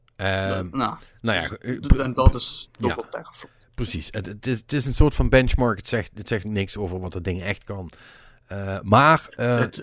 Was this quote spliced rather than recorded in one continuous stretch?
yes; 1 cut; at 6.4 s

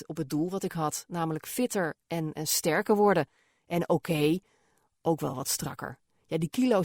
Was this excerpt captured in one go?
yes; 0 cuts

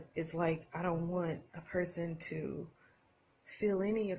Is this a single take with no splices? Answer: no; 1 cut; at 1.5 s

